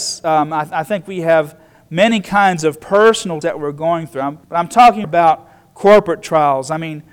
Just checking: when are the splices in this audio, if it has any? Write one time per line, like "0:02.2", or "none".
0:03.4
0:04.4
0:05.0